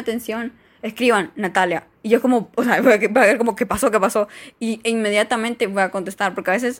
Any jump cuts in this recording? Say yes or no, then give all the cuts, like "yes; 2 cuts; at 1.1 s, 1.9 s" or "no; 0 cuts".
yes; 1 cut; at 1.9 s